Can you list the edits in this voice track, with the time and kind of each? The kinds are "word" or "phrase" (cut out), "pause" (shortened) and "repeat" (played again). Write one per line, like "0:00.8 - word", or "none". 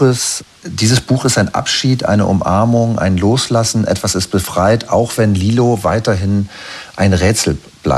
none